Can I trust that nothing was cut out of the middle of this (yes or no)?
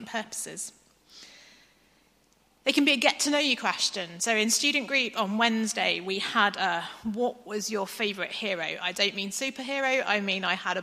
yes